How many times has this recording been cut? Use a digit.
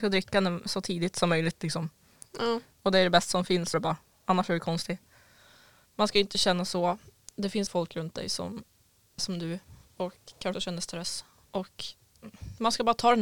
5